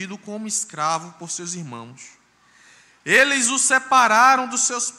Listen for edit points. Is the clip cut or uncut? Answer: uncut